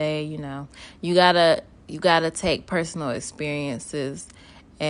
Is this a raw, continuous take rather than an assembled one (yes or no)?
yes